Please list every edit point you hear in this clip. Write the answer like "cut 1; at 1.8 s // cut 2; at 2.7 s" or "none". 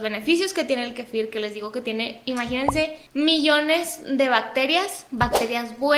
cut 1; at 3.1 s